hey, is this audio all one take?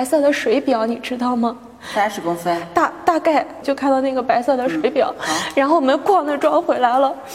yes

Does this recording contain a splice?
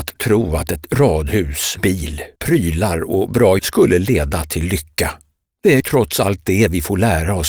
yes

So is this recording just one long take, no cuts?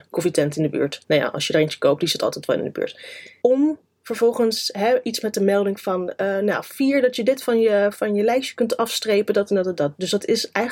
no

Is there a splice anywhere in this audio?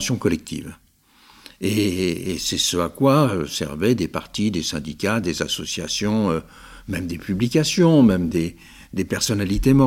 no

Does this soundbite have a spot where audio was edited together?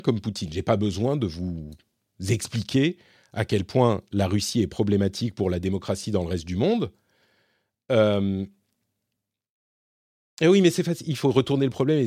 no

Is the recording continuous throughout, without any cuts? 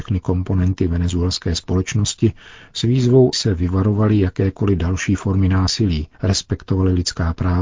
no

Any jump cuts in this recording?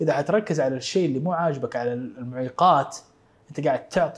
no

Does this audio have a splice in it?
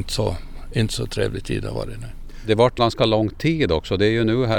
yes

